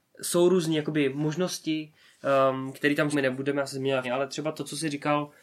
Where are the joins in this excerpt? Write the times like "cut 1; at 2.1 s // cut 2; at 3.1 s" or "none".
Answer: cut 1; at 2.7 s // cut 2; at 3.1 s // cut 3; at 4.0 s